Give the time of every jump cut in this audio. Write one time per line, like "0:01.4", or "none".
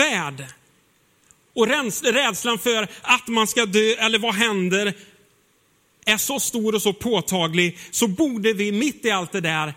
none